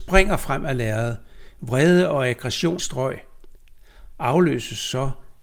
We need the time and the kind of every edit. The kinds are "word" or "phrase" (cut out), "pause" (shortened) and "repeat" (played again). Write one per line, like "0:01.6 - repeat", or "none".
0:02.8 - phrase